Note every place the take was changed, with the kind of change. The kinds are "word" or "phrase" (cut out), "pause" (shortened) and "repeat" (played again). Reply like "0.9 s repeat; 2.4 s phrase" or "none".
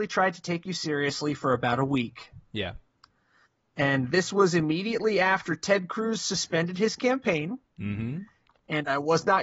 none